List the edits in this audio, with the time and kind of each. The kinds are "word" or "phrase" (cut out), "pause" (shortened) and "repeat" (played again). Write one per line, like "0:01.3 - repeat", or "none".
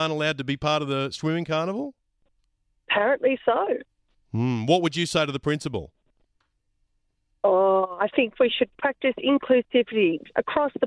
none